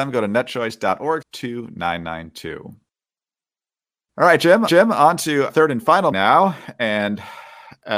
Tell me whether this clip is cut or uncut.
cut